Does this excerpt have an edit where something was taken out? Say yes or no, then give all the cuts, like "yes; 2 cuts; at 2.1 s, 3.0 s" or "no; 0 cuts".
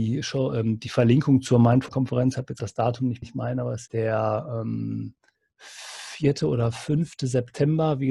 yes; 5 cuts; at 1.9 s, 2.6 s, 3.2 s, 3.9 s, 5.3 s